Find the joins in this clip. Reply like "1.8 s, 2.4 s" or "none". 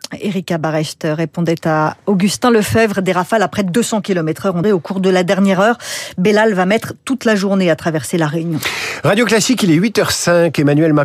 4.6 s